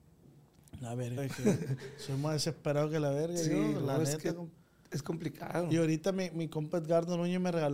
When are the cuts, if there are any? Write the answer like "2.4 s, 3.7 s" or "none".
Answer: 1.2 s